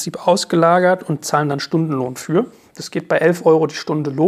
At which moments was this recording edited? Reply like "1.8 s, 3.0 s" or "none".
none